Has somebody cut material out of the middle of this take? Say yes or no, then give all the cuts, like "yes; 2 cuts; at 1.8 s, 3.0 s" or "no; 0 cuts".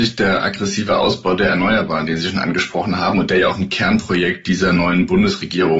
no; 0 cuts